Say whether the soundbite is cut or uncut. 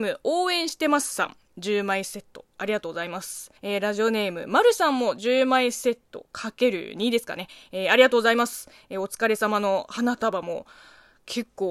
cut